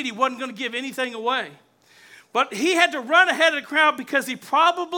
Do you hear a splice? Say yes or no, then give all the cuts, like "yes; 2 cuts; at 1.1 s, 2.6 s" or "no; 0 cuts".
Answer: no; 0 cuts